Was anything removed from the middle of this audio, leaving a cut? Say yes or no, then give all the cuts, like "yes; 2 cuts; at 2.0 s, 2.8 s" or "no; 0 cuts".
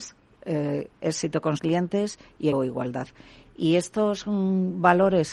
yes; 2 cuts; at 1.6 s, 2.5 s